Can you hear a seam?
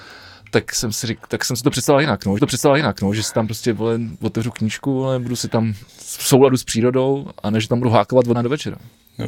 yes; 3 cuts; at 2.4 s, 5.9 s, 8.3 s

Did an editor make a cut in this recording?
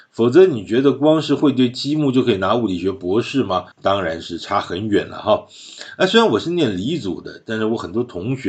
yes; 1 cut; at 3.7 s

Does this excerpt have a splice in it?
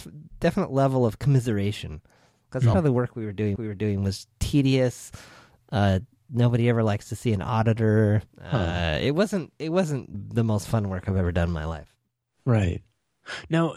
yes; 4 cuts; at 2.7 s, 3.6 s, 8.3 s, 10.1 s

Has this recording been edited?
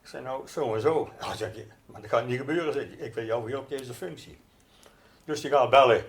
no; 0 cuts

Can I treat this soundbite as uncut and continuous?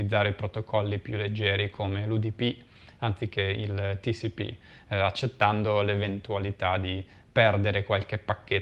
yes; 0 cuts

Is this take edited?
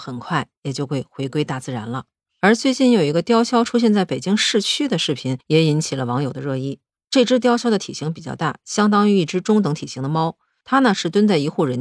yes; 1 cut; at 5.4 s

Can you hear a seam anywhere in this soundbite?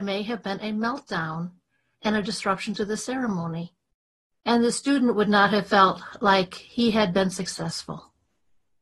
no; 0 cuts

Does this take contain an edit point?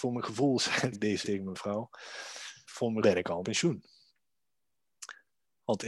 yes; 5 cuts; at 0.9 s, 1.2 s, 2.6 s, 3.0 s, 3.4 s

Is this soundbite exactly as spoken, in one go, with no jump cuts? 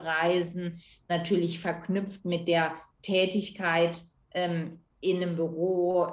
yes; 0 cuts

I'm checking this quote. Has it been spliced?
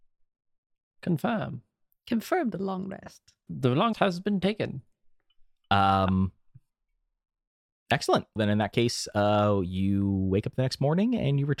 yes; 3 cuts; at 3.5 s, 3.9 s, 8.4 s

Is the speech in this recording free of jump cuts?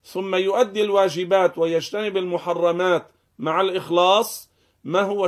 yes; 0 cuts

